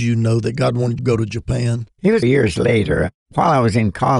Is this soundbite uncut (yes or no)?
no